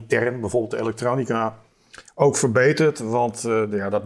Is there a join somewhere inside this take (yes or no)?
no